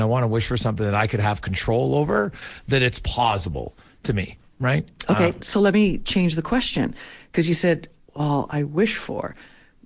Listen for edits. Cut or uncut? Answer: uncut